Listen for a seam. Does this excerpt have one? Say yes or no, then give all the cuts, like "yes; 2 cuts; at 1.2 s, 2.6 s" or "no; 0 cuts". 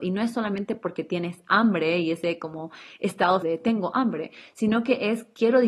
yes; 1 cut; at 3.4 s